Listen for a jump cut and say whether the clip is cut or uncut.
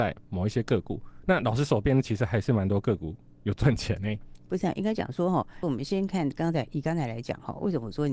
cut